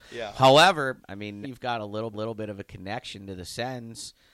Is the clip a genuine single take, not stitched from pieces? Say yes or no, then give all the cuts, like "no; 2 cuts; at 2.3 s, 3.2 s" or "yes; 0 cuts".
no; 3 cuts; at 1.0 s, 1.4 s, 2.1 s